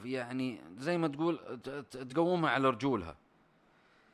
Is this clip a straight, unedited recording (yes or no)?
yes